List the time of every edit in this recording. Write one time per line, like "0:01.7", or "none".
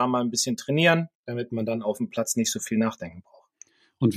0:01.1